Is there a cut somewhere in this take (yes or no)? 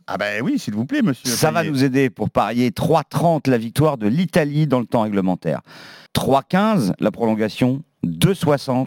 yes